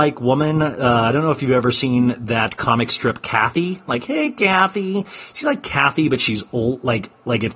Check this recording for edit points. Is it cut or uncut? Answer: uncut